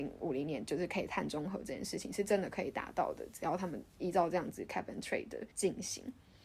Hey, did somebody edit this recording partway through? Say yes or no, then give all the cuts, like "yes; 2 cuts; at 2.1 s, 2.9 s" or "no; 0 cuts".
yes; 1 cut; at 5.5 s